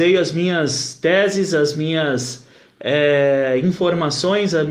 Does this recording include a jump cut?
no; 0 cuts

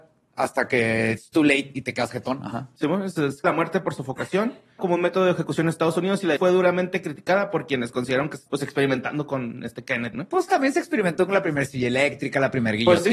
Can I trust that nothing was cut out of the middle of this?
no; 6 cuts; at 3.4 s, 4.8 s, 6.4 s, 8.5 s, 10.1 s, 10.5 s

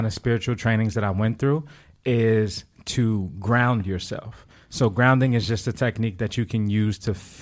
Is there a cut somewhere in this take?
no; 0 cuts

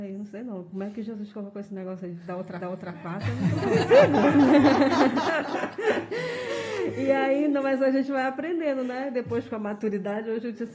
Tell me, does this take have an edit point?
yes; 1 cut; at 2.6 s

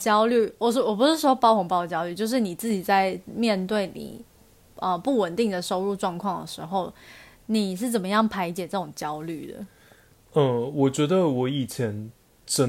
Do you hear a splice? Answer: no; 0 cuts

